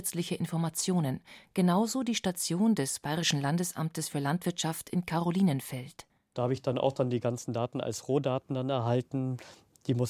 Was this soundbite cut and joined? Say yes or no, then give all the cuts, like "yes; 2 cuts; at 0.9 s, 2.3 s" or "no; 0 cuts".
no; 0 cuts